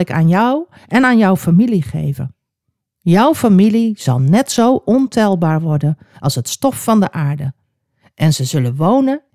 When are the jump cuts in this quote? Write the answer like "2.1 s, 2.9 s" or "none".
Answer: none